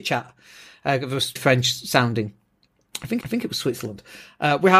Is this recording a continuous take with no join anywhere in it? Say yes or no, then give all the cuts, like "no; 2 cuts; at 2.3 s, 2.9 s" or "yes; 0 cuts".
no; 2 cuts; at 1.4 s, 3.2 s